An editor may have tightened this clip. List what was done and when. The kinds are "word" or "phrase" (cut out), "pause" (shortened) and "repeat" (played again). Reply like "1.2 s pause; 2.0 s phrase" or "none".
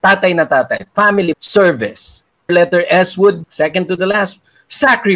1.3 s word; 2.5 s word; 3.4 s word